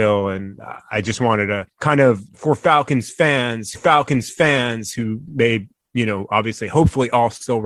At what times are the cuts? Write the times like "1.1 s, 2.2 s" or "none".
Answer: 1.7 s, 2.3 s, 3.7 s

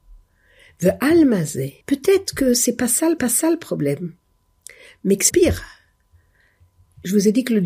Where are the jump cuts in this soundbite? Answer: 1.8 s, 3.2 s, 5.3 s

